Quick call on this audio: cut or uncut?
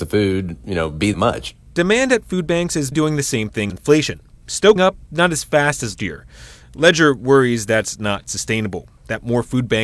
cut